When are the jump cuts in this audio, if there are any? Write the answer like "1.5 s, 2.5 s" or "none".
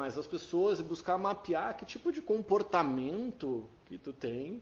none